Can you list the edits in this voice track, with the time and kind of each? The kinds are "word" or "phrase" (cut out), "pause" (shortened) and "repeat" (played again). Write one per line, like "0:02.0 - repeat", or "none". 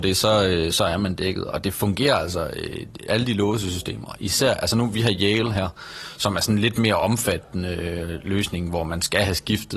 none